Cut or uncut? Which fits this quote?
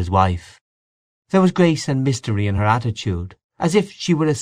uncut